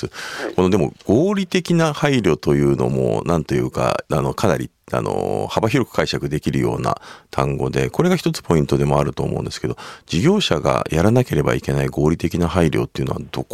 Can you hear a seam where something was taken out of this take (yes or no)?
yes